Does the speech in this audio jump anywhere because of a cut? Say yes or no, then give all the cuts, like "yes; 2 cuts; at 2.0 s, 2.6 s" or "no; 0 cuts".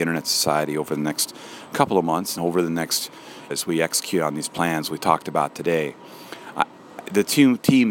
yes; 2 cuts; at 2.4 s, 3.5 s